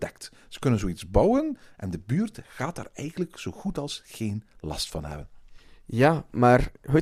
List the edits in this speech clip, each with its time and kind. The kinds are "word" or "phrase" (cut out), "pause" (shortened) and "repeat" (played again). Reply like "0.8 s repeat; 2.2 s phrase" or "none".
none